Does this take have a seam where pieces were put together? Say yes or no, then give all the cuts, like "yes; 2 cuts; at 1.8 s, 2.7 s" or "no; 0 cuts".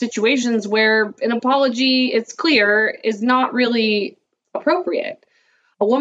no; 0 cuts